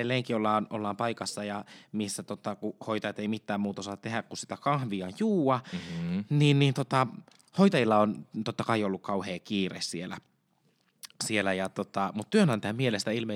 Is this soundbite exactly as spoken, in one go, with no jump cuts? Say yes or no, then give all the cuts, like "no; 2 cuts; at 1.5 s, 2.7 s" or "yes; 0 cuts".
yes; 0 cuts